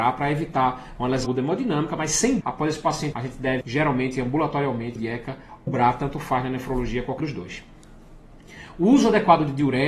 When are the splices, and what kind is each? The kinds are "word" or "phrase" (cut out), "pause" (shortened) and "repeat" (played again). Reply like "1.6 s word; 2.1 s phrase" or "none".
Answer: 1.2 s word; 2.4 s word; 3.1 s word; 3.6 s word; 5.0 s word; 5.7 s word; 7.2 s word